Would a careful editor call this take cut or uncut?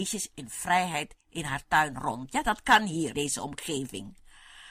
cut